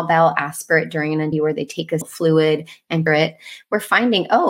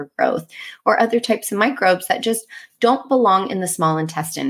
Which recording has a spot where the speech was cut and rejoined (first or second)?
first